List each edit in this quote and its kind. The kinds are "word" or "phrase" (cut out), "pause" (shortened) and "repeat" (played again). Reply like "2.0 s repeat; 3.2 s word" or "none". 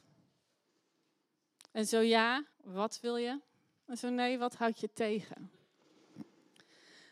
2.5 s pause